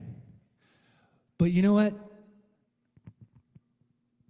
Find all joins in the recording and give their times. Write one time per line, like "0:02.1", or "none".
none